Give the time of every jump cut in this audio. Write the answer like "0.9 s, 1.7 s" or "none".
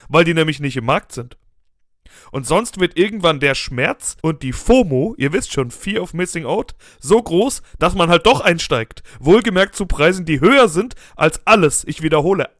4.2 s